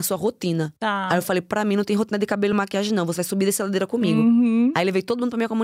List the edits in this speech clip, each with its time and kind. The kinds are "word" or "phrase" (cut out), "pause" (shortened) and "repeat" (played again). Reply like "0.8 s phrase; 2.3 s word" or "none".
none